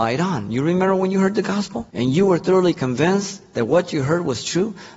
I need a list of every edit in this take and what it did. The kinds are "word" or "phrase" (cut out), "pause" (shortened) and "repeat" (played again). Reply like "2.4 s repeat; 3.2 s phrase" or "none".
1.9 s pause

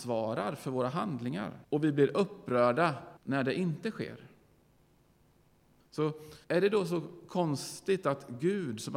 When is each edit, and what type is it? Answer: 1.6 s pause; 3.2 s pause; 6.4 s pause

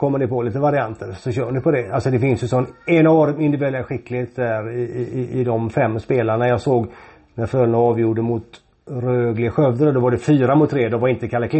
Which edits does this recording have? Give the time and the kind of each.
none

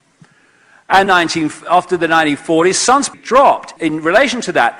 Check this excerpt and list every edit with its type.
1.1 s word; 3.1 s phrase; 3.8 s word

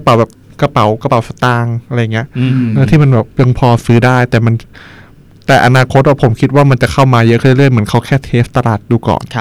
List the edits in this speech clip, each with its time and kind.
none

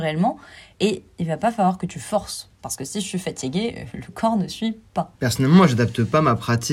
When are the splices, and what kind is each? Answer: 2.5 s pause; 5.2 s pause

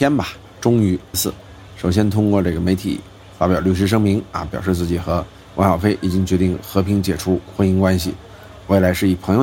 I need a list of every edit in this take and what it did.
1.1 s word

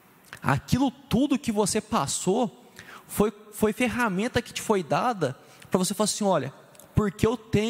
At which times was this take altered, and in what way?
none

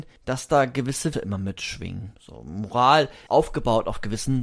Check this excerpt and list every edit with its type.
1.1 s word; 2.1 s pause; 3.3 s word

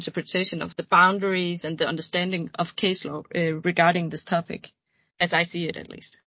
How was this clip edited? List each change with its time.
none

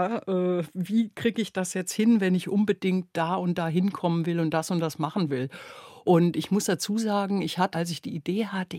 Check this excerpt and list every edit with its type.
7.7 s word

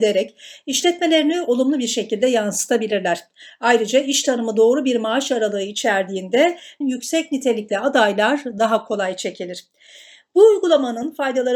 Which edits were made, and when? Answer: 6.8 s phrase

